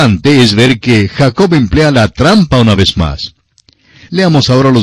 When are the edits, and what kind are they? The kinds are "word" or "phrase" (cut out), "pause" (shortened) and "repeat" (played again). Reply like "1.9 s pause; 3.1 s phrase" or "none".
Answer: none